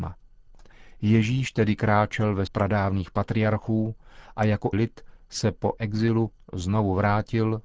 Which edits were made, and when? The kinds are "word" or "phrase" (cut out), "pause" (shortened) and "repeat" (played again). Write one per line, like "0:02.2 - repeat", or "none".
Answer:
0:02.5 - word
0:04.7 - word
0:05.8 - word